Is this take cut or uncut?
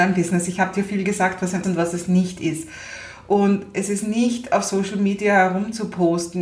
cut